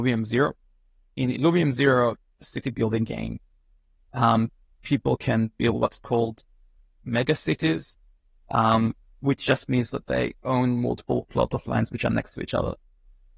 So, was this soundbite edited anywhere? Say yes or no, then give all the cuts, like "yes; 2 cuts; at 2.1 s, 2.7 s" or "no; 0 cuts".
no; 0 cuts